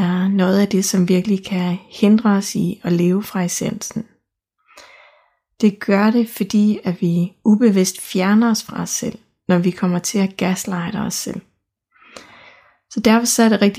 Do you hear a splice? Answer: no; 0 cuts

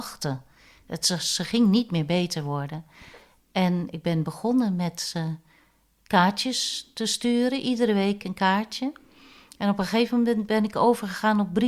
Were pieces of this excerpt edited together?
no; 0 cuts

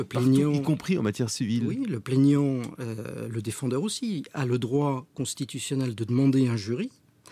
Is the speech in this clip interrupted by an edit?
no; 0 cuts

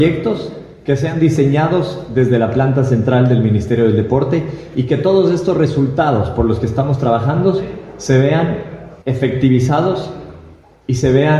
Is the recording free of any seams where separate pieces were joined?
no; 1 cut; at 9.0 s

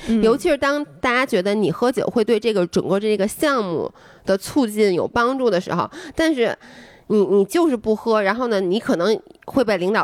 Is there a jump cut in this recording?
no; 0 cuts

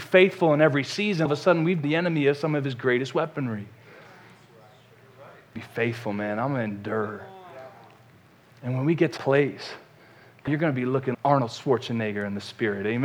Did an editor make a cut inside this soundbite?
yes; 6 cuts; at 1.3 s, 1.8 s, 5.6 s, 9.2 s, 10.5 s, 11.1 s

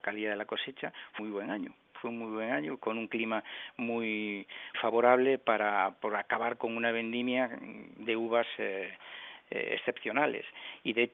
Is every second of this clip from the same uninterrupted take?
no; 3 cuts; at 1.2 s, 2.8 s, 4.7 s

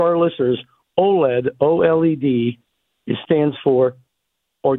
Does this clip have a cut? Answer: yes; 1 cut; at 3.2 s

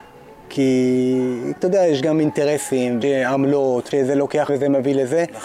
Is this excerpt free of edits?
no; 4 cuts; at 1.6 s, 3.0 s, 3.9 s, 4.5 s

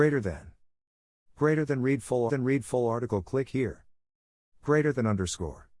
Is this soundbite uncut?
no; 1 cut; at 2.3 s

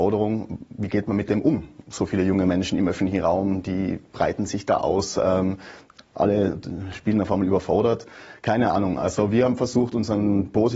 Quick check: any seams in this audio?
no; 0 cuts

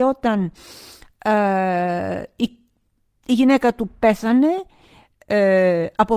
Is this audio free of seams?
yes; 0 cuts

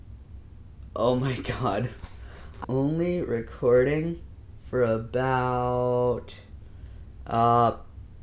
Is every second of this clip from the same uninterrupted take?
no; 1 cut; at 2.6 s

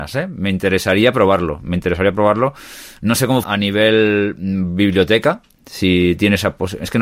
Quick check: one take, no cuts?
no; 1 cut; at 3.4 s

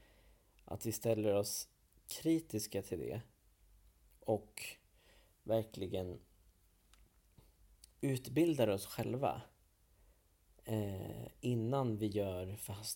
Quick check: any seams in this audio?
no; 0 cuts

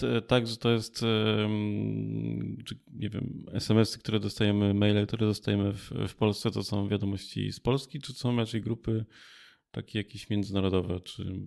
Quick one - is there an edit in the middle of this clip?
no; 0 cuts

